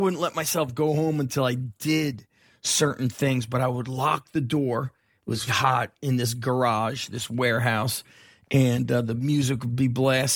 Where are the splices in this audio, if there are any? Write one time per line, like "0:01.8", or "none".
0:05.5